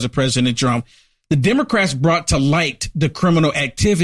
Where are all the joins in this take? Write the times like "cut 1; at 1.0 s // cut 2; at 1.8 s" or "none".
none